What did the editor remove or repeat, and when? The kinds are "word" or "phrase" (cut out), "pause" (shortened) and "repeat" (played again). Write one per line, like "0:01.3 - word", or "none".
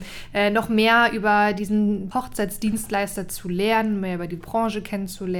0:02.1 - word